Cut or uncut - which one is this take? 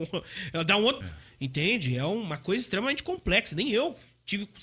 cut